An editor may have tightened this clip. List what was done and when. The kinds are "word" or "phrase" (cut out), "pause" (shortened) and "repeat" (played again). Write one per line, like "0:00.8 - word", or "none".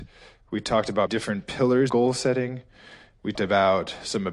0:01.1 - word
0:01.9 - word
0:03.3 - word